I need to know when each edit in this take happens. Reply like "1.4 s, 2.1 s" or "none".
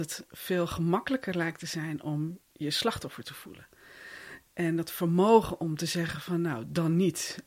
2.4 s